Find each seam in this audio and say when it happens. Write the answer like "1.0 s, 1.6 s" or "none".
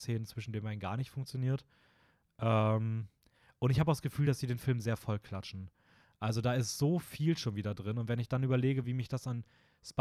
none